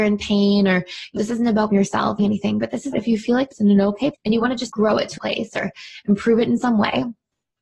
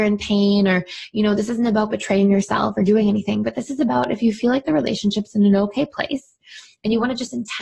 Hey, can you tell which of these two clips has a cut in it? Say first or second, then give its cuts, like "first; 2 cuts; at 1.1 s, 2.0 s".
first; 8 cuts; at 1.2 s, 1.7 s, 2.2 s, 2.9 s, 3.5 s, 4.1 s, 4.7 s, 5.2 s